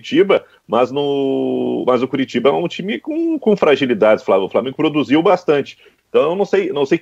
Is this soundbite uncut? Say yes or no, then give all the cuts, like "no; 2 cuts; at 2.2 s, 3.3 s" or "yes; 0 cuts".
yes; 0 cuts